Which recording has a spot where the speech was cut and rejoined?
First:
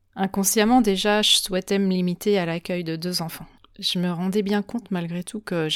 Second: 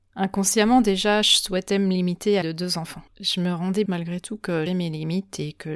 second; 4 cuts; at 2.4 s, 3.1 s, 3.9 s, 4.7 s

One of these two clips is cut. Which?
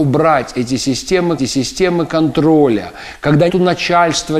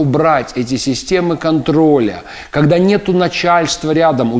first; 2 cuts; at 1.4 s, 3.5 s

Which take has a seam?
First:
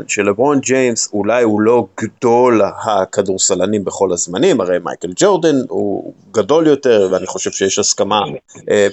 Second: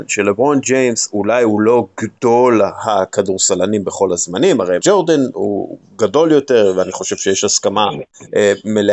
second; 1 cut; at 4.8 s

